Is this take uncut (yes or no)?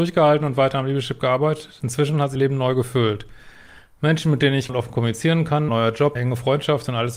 no